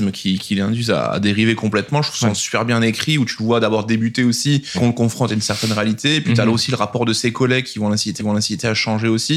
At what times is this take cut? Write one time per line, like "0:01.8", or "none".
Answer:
0:04.7
0:08.2